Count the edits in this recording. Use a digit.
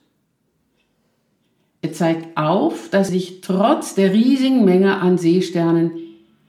1